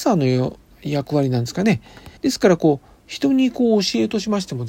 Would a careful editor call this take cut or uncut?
cut